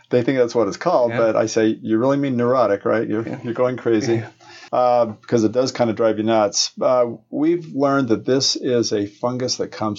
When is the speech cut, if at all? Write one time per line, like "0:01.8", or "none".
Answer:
0:04.7